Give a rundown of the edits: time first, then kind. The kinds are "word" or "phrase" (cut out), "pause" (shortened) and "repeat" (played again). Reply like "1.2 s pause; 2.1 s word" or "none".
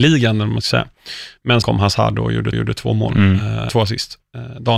1.6 s word; 2.5 s repeat; 3.7 s word